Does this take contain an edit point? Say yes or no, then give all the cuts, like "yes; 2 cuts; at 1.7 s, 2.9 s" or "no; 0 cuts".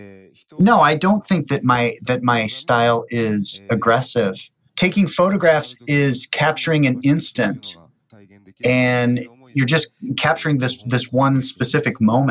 no; 0 cuts